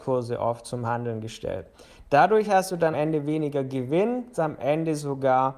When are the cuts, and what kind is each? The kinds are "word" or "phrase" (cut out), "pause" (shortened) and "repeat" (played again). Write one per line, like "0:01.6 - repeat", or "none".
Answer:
0:02.9 - word
0:04.3 - word